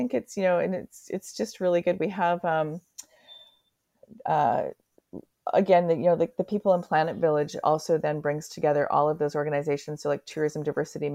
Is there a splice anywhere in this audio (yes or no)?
no